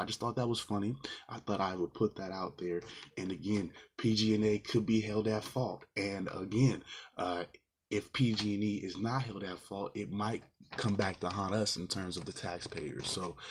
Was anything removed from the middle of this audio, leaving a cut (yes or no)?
no